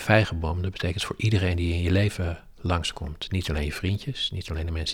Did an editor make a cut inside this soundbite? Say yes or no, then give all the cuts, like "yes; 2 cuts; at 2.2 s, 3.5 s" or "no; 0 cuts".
no; 0 cuts